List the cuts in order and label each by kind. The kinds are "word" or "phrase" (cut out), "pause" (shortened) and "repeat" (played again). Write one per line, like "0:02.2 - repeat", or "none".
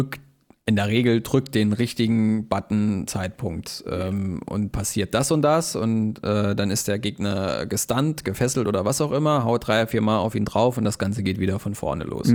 0:03.1 - phrase
0:04.7 - word